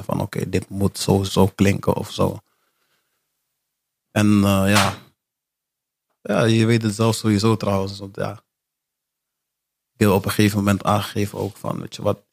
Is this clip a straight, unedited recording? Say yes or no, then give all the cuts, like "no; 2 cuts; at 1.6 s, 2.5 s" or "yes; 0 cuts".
no; 1 cut; at 1.3 s